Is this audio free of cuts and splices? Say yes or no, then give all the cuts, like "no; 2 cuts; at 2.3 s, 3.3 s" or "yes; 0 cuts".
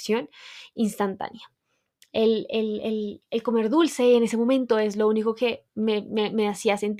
yes; 0 cuts